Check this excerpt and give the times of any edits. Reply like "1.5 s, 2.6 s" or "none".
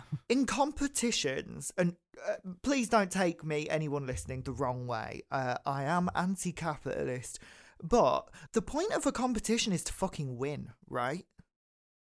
8.5 s